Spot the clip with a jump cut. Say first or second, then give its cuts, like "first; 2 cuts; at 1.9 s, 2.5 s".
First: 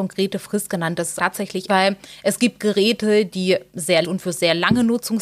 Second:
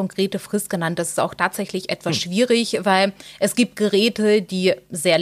first; 3 cuts; at 1.2 s, 1.7 s, 4.0 s